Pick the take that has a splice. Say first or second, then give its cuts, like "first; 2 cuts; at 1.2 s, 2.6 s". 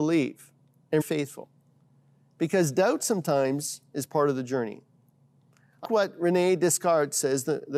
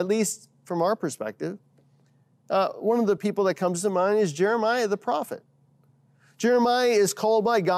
first; 2 cuts; at 1.0 s, 5.8 s